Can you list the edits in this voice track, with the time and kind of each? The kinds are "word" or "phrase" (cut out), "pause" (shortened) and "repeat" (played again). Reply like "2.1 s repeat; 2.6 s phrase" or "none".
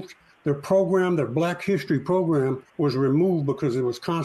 2.7 s pause